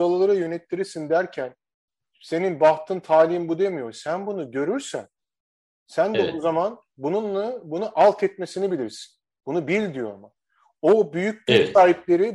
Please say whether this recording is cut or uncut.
uncut